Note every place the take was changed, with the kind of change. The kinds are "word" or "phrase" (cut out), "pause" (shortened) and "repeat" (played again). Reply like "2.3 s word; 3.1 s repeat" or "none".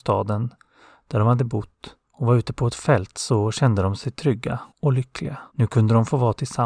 2.0 s pause; 4.7 s pause; 5.5 s pause